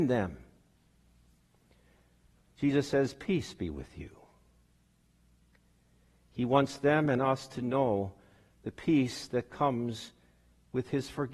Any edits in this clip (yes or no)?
no